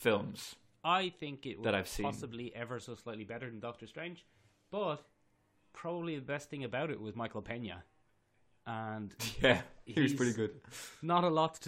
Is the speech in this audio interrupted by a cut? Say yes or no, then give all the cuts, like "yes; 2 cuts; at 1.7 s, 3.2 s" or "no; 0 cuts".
no; 0 cuts